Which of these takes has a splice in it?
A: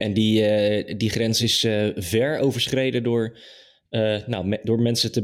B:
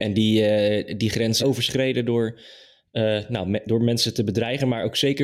B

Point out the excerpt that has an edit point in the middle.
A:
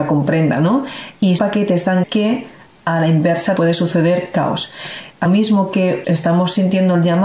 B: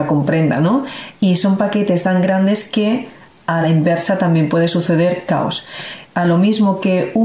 A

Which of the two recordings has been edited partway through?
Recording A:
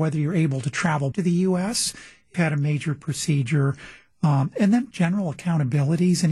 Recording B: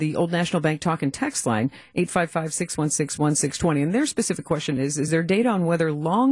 A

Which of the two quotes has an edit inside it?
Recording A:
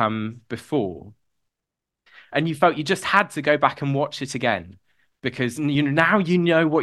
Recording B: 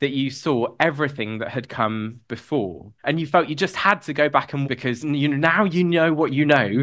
B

